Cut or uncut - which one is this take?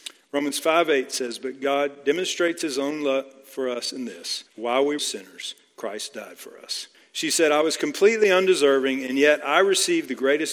cut